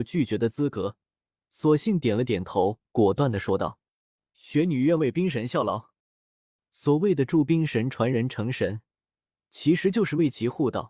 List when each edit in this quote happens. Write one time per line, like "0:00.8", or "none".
0:06.0